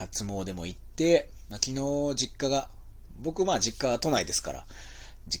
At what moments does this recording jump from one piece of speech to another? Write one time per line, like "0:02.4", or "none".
none